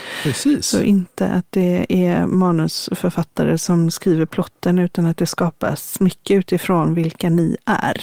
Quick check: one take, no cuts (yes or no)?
yes